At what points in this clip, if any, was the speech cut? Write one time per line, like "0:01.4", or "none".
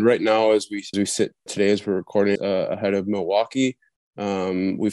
0:00.9
0:01.5
0:02.4